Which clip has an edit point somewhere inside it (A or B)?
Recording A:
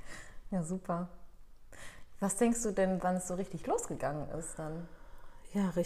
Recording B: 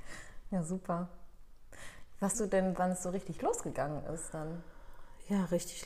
B